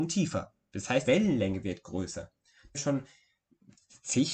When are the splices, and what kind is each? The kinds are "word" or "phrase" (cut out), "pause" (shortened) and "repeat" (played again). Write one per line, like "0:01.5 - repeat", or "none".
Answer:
0:01.0 - word
0:02.7 - word